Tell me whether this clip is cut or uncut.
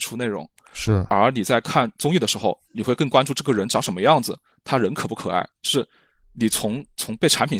cut